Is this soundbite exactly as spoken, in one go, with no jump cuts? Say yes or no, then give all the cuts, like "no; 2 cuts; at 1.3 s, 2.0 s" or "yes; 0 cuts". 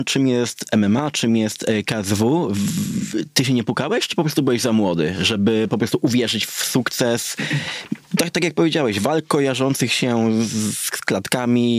yes; 0 cuts